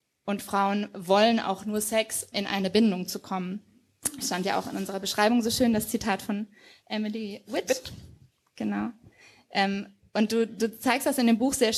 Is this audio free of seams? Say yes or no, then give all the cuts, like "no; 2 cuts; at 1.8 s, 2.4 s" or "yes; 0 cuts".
no; 1 cut; at 2.3 s